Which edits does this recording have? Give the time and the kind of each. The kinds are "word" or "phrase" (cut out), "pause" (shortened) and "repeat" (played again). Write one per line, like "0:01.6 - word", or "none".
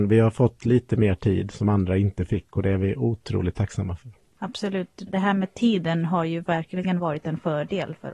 0:05.1 - word